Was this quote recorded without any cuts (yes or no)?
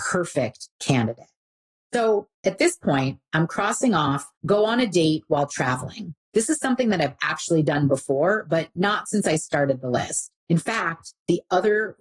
no